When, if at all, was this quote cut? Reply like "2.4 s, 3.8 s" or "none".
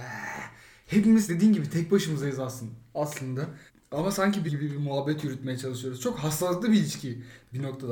1.3 s, 3.7 s, 4.5 s